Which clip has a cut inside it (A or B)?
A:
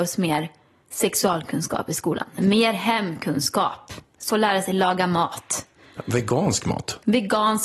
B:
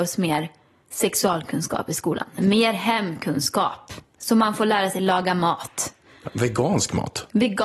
A